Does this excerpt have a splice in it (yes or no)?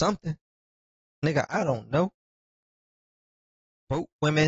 no